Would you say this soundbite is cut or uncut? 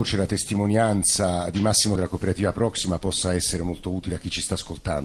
cut